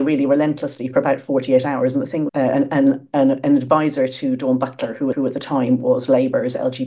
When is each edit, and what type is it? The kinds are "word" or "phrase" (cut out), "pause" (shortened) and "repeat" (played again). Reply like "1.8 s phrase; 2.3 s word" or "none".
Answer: 2.3 s phrase; 5.1 s repeat